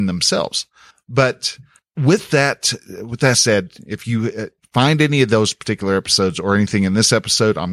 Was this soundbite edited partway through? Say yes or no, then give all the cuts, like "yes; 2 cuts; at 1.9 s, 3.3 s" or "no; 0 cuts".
yes; 1 cut; at 0.9 s